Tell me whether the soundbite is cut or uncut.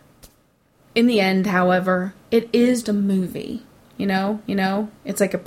cut